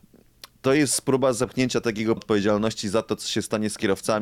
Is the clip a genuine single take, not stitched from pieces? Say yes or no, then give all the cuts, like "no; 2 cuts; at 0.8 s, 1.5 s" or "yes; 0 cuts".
no; 1 cut; at 2.2 s